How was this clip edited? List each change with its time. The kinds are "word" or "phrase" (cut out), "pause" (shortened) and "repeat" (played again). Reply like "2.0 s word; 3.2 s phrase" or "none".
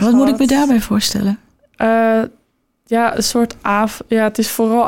none